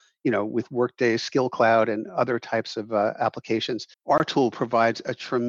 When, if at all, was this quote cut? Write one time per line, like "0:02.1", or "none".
0:03.9